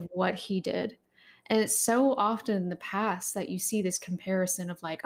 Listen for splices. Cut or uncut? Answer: uncut